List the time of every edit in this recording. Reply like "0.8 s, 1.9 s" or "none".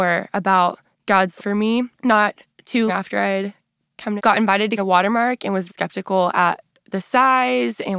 1.4 s, 1.9 s, 2.9 s, 4.2 s, 4.8 s, 5.7 s

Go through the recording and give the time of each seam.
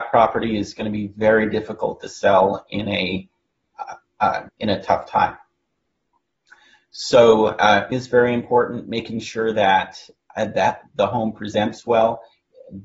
4.5 s, 7.9 s

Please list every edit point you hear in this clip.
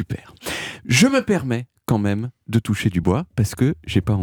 none

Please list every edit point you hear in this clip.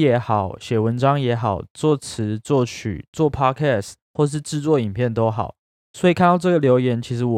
none

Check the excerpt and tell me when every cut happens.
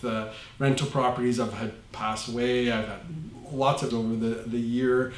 1.9 s, 3.9 s

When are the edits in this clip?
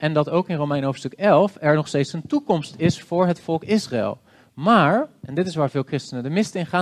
none

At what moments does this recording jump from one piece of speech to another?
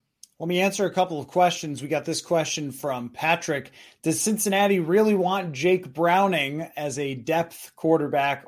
none

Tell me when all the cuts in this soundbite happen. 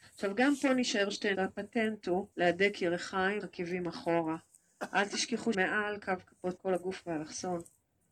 1.3 s, 2.3 s, 3.4 s, 5.5 s, 6.6 s

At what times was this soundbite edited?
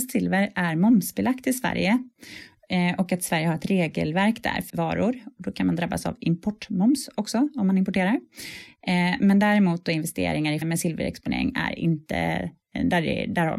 4.7 s, 10.6 s

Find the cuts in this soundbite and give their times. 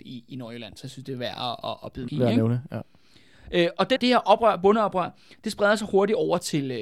2.1 s, 4.0 s

